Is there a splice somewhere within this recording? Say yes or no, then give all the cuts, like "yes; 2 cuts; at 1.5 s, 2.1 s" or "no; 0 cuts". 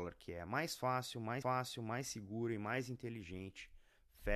yes; 1 cut; at 1.4 s